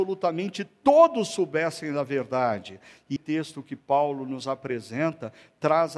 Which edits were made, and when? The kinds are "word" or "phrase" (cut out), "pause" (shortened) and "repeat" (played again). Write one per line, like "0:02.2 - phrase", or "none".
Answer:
0:03.2 - word